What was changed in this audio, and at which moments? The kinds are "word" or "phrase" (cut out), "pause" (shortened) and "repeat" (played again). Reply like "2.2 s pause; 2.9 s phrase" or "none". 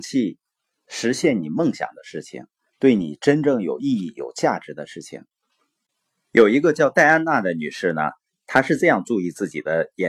none